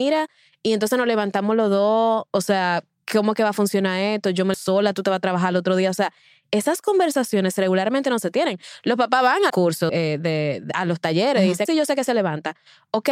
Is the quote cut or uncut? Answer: cut